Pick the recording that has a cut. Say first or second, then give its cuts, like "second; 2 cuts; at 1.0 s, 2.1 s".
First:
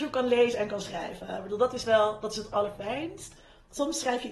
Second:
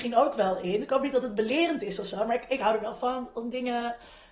first; 1 cut; at 2.5 s